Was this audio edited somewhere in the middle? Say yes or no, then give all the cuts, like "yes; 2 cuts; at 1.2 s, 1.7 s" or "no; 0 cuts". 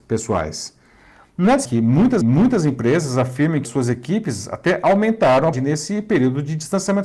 yes; 4 cuts; at 1.6 s, 2.2 s, 3.6 s, 5.5 s